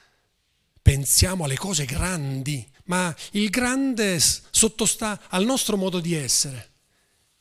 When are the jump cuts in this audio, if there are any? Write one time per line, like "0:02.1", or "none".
0:02.7